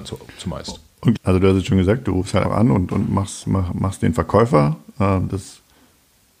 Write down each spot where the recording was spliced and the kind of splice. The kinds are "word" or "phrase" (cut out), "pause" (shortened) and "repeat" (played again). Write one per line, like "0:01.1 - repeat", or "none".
0:01.2 - phrase
0:02.4 - word